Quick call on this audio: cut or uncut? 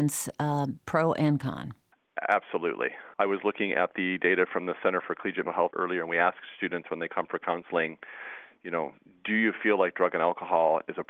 cut